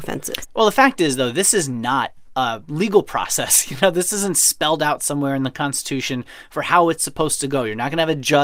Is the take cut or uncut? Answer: uncut